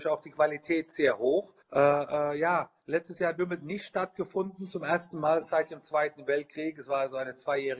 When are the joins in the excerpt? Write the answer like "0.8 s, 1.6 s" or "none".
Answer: 1.6 s, 2.8 s